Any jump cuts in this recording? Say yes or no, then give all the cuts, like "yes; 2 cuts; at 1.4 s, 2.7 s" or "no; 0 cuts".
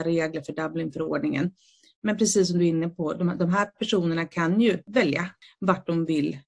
no; 0 cuts